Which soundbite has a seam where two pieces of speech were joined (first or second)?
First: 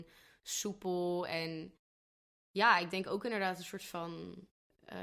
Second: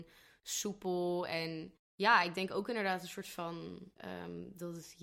second